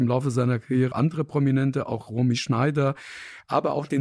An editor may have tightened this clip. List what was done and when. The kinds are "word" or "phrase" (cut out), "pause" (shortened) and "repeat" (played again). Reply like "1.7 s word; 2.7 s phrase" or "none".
0.9 s word

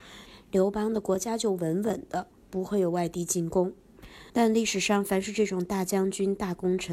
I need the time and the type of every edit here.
4.3 s pause

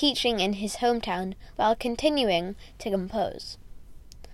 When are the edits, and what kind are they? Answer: 1.5 s word

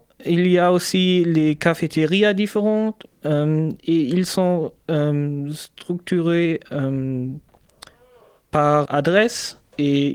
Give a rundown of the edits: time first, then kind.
8.9 s word

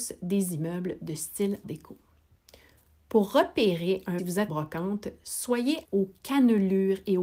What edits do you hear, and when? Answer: 1.6 s word; 4.2 s phrase; 4.5 s word; 5.8 s word

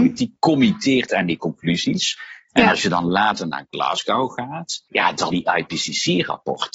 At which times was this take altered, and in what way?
4.9 s pause; 5.3 s word

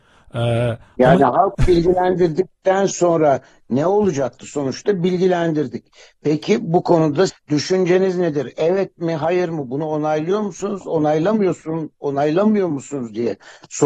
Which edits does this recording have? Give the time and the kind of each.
7.3 s word

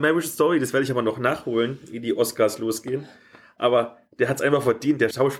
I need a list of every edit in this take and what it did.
none

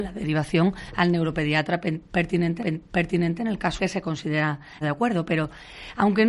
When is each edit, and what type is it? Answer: 2.6 s repeat; 3.8 s word; 4.8 s word

